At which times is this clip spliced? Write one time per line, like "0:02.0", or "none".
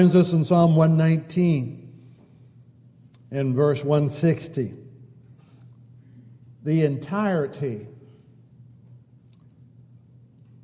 none